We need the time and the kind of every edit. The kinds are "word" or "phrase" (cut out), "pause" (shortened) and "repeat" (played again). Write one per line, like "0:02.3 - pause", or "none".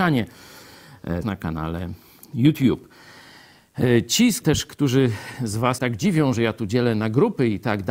0:01.2 - phrase
0:04.4 - word
0:05.8 - word